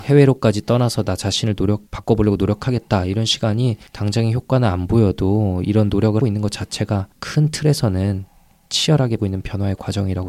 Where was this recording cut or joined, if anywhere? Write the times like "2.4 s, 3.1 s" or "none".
1.9 s, 3.9 s, 6.2 s, 7.1 s, 9.2 s